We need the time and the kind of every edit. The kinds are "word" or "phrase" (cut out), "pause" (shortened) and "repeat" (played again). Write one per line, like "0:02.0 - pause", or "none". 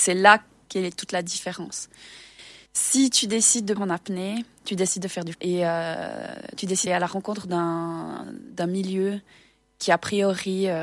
0:02.7 - pause
0:03.8 - phrase
0:05.3 - word
0:06.9 - word